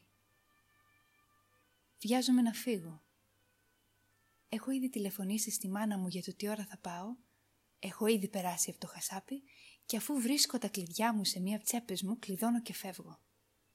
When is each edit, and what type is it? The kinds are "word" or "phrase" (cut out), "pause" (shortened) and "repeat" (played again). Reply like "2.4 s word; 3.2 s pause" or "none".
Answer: 11.6 s word